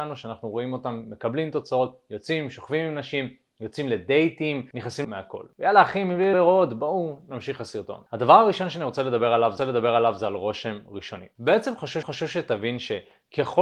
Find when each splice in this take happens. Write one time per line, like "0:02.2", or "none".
0:05.0
0:06.3
0:09.6
0:12.0